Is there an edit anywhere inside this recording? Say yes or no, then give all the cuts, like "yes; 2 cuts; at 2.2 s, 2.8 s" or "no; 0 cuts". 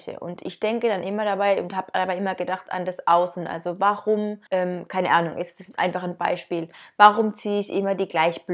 yes; 1 cut; at 4.5 s